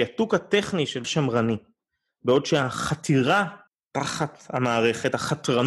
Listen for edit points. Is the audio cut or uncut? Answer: cut